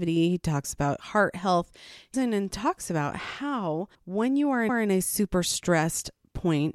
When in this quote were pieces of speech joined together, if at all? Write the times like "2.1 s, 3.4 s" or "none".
2.1 s, 3.9 s, 4.7 s